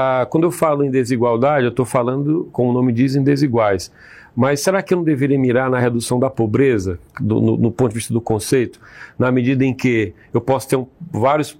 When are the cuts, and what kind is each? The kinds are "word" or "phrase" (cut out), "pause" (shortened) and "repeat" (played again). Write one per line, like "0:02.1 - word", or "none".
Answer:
none